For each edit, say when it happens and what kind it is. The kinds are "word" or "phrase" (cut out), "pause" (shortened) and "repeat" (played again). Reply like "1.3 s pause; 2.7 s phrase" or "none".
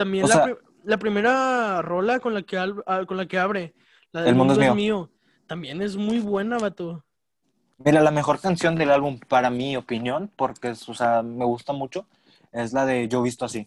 none